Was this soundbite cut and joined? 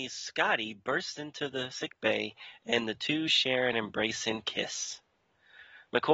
no; 0 cuts

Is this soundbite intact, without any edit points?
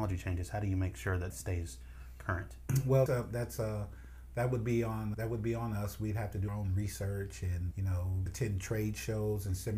no; 6 cuts; at 1.3 s, 3.1 s, 5.1 s, 6.5 s, 7.7 s, 8.3 s

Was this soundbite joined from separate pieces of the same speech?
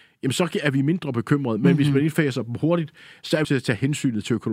yes; 1 cut; at 3.4 s

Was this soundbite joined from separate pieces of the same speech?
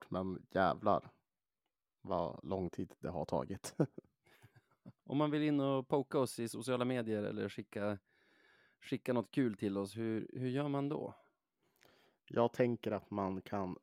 yes; 1 cut; at 5.0 s

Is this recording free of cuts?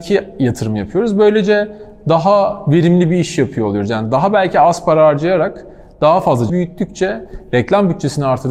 no; 1 cut; at 6.5 s

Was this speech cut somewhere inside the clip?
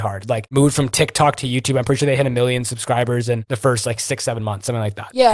no; 0 cuts

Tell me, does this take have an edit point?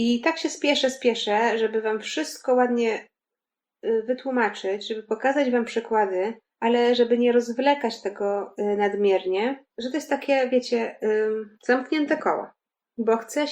yes; 3 cuts; at 6.4 s, 9.7 s, 11.6 s

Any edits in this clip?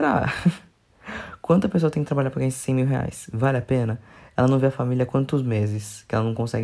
no; 0 cuts

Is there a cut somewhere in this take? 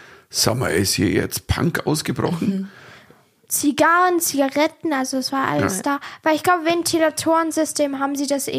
no; 0 cuts

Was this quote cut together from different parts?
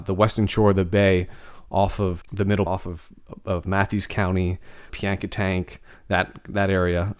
yes; 4 cuts; at 2.2 s, 2.7 s, 3.6 s, 4.9 s

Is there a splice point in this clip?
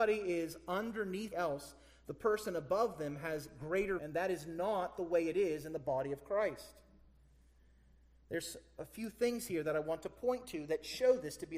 yes; 2 cuts; at 1.3 s, 4.0 s

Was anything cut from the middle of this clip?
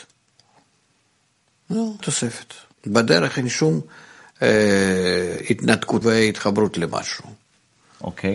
yes; 3 cuts; at 2.0 s, 2.7 s, 6.0 s

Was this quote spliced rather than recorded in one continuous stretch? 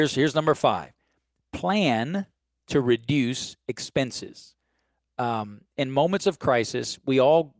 no; 0 cuts

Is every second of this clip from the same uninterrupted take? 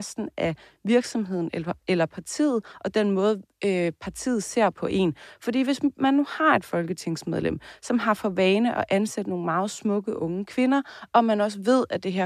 yes; 0 cuts

